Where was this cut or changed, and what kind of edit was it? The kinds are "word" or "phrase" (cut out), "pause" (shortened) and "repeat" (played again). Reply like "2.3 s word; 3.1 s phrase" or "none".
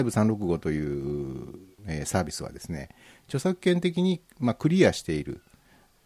none